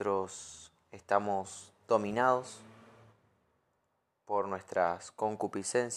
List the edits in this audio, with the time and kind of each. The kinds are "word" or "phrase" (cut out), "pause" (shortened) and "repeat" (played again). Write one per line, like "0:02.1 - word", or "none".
none

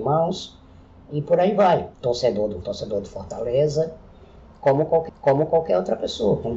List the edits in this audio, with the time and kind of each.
0:01.9 - pause
0:02.6 - word
0:05.1 - repeat

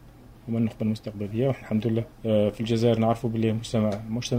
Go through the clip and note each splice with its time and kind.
0:01.6 - word
0:02.1 - pause

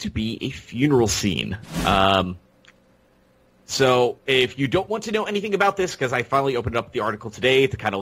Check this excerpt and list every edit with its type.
none

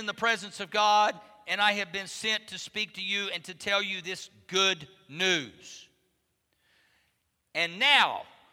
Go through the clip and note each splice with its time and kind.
none

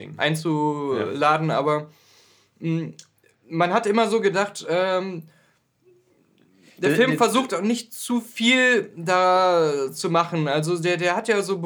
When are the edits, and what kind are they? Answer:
none

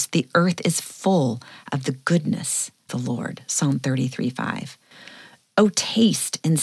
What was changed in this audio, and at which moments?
0:02.9 - word

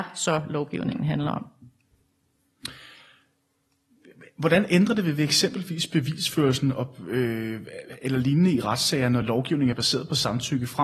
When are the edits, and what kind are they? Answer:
none

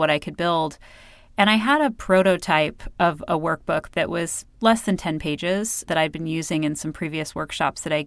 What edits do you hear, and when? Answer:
0:05.9 - word

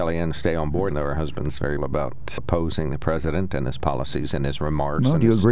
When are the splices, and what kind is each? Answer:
0:00.9 - word
0:01.8 - word
0:02.4 - word

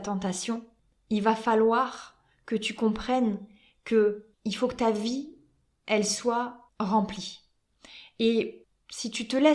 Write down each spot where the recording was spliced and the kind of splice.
0:04.3 - pause

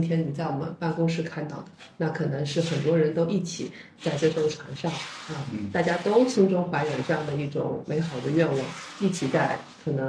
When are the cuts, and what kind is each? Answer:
none

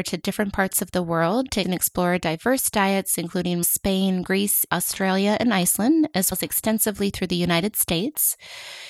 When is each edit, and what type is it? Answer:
0:01.6 - word
0:03.6 - word
0:04.7 - word
0:06.3 - word

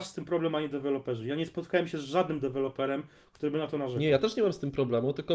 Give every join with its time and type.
none

